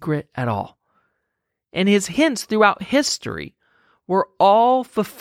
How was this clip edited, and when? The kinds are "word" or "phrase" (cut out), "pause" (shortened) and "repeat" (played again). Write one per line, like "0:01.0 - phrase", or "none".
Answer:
none